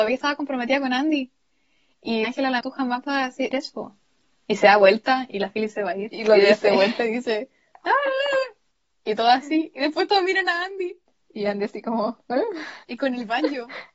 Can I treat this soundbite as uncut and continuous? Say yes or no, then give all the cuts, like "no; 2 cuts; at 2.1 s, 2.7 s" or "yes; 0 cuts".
no; 6 cuts; at 2.2 s, 2.6 s, 3.5 s, 8.7 s, 11.1 s, 12.8 s